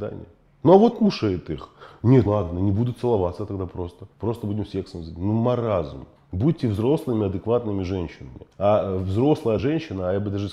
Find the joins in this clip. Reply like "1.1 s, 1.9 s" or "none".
0.9 s, 2.3 s, 4.1 s, 6.2 s, 8.5 s, 9.6 s